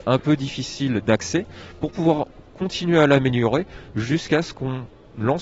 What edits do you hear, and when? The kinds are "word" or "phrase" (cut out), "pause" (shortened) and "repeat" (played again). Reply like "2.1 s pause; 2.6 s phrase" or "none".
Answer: none